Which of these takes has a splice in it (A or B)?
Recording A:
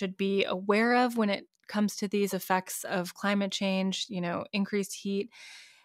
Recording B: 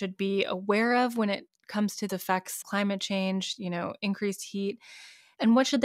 B